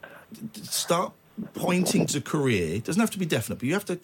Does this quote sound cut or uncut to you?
cut